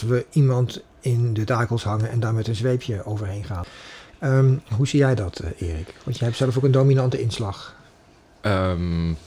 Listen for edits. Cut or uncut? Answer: uncut